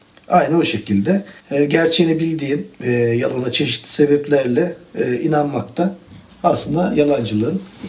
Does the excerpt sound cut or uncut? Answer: cut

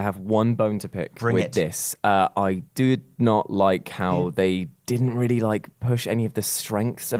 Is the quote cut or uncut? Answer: cut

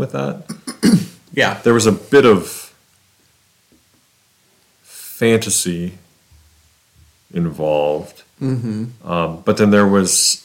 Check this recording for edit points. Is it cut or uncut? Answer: uncut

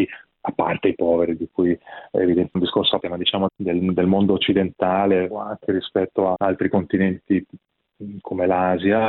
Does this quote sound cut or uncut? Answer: cut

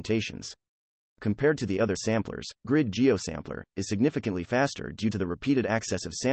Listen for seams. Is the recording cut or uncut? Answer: cut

